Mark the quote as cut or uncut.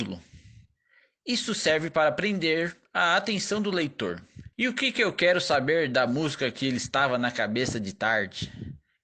cut